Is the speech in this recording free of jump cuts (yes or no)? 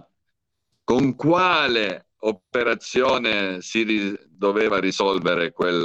yes